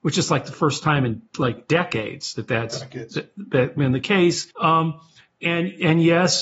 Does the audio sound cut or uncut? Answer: cut